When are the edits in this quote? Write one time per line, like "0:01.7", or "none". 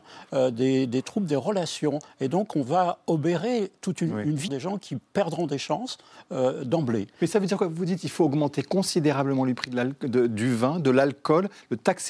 0:04.5

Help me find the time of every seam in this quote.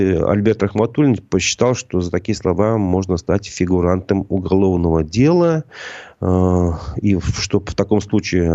none

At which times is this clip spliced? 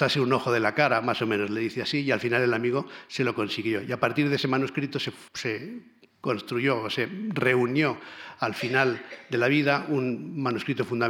0:05.3

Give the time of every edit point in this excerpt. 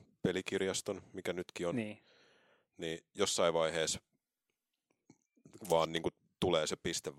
none

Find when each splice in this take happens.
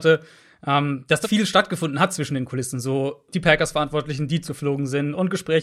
0:01.2
0:03.3
0:04.5

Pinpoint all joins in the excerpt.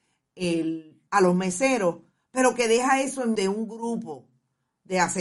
0:01.1
0:03.4

